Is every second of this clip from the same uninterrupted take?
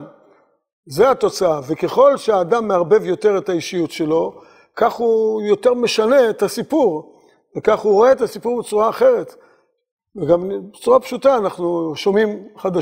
yes; 0 cuts

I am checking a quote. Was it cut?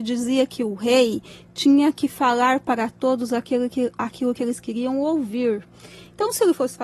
no; 0 cuts

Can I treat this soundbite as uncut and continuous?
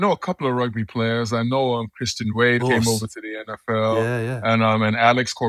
no; 1 cut; at 2.6 s

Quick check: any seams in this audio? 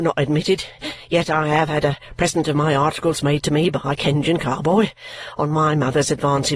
no; 0 cuts

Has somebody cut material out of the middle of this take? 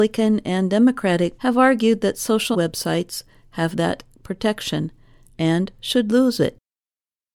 yes; 3 cuts; at 1.4 s, 2.5 s, 3.7 s

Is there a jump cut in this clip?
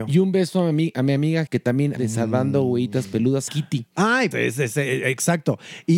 yes; 4 cuts; at 1.5 s, 2.0 s, 3.5 s, 4.3 s

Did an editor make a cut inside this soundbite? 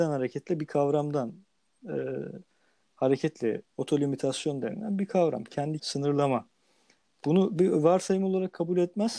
yes; 2 cuts; at 3.7 s, 5.8 s

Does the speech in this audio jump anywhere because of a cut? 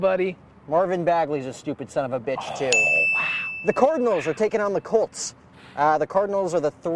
no; 0 cuts

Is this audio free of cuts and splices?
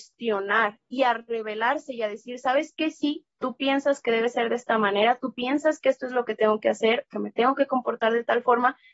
yes; 0 cuts

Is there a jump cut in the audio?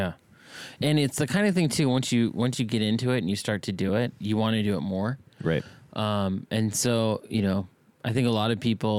no; 0 cuts

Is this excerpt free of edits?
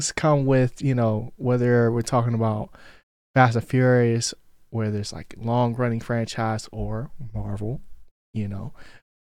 yes; 0 cuts

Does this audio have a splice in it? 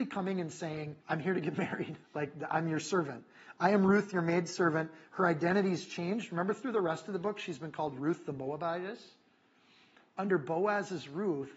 yes; 2 cuts; at 1.0 s, 2.0 s

